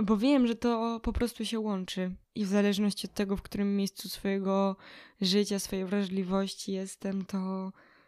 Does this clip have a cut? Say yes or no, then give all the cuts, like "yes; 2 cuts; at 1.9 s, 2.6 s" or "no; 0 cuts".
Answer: yes; 1 cut; at 2.2 s